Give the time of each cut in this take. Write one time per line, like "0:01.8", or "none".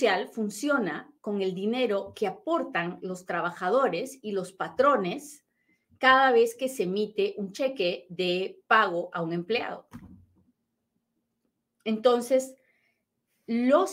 none